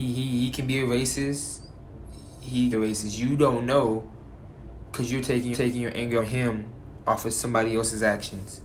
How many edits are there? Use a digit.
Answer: 3